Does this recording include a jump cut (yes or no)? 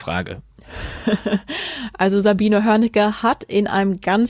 no